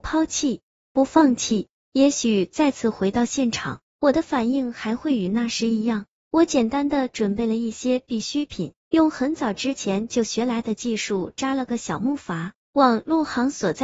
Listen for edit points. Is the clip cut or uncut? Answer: cut